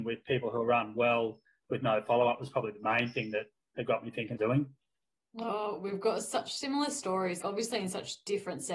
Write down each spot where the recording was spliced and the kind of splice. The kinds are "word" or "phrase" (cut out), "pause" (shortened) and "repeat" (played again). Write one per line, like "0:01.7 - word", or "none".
0:04.4 - phrase
0:07.4 - word